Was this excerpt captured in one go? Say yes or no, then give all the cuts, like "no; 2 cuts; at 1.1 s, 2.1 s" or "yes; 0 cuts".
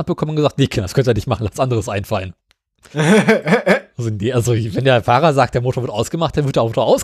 no; 2 cuts; at 1.6 s, 2.4 s